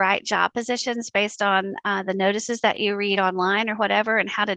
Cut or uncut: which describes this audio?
uncut